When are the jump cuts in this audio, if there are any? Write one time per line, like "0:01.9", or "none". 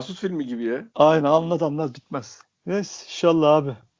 none